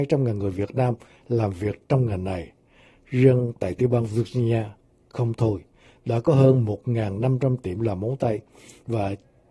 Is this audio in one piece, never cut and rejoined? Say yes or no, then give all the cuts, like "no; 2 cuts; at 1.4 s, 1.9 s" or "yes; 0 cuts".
yes; 0 cuts